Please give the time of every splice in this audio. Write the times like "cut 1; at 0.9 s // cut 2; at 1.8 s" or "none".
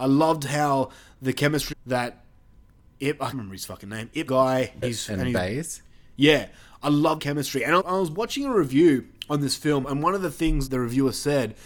cut 1; at 1.7 s // cut 2; at 3.3 s // cut 3; at 4.3 s // cut 4; at 4.8 s // cut 5; at 7.2 s // cut 6; at 7.8 s // cut 7; at 9.8 s // cut 8; at 10.7 s